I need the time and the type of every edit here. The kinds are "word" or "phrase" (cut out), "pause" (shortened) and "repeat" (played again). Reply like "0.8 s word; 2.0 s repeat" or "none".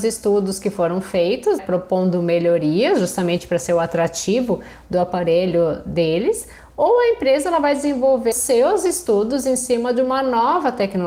1.6 s word; 8.3 s word